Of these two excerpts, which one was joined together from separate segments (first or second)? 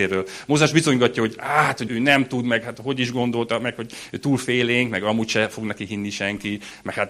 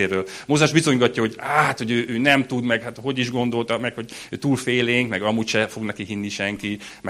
first